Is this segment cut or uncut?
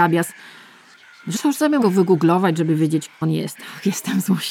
cut